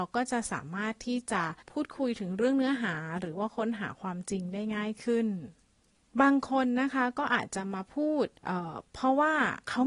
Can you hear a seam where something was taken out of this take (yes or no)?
yes